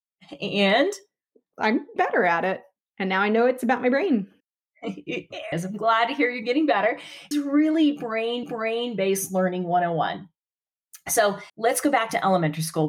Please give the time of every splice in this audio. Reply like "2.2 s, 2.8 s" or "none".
1.5 s, 2.0 s, 2.8 s, 4.4 s, 5.5 s, 7.3 s, 8.4 s, 11.5 s

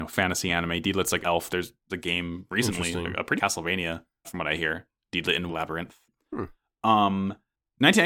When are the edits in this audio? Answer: 1.2 s, 1.9 s, 3.4 s, 4.2 s, 5.5 s

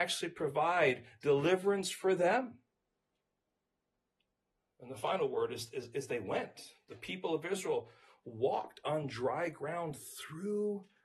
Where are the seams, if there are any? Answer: none

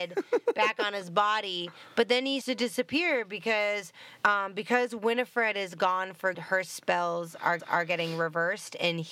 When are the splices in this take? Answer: 2.4 s, 4.2 s, 6.3 s, 7.6 s

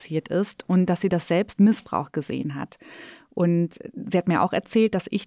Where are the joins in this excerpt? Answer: 1.6 s

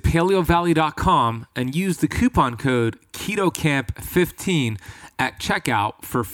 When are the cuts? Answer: none

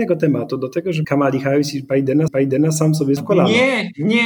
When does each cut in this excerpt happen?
1.0 s, 2.3 s, 3.2 s

